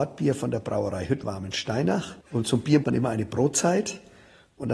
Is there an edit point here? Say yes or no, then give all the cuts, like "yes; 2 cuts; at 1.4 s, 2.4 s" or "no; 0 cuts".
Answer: yes; 3 cuts; at 1.2 s, 2.2 s, 2.8 s